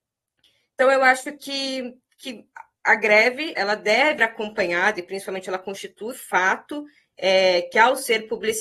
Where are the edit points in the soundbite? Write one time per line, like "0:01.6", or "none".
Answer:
0:03.5
0:04.2
0:06.1

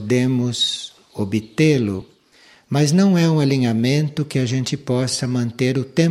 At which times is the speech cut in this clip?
none

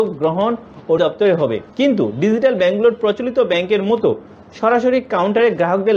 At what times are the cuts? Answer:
0:01.0
0:01.7

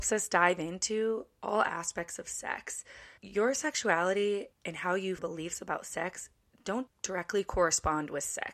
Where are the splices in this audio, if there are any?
0:03.2
0:04.5
0:05.2
0:06.9

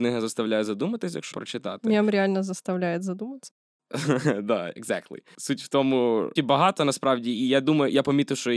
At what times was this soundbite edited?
0:01.3
0:06.4

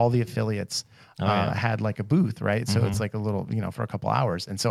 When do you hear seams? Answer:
none

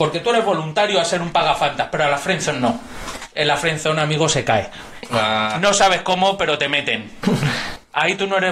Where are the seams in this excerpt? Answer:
none

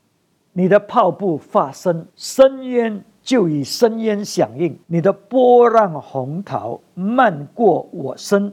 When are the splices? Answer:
0:02.1
0:04.8

